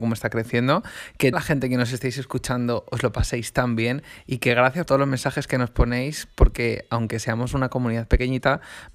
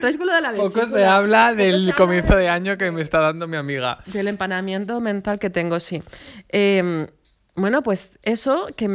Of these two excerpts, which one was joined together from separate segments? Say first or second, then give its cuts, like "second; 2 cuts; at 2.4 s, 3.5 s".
first; 2 cuts; at 1.3 s, 4.9 s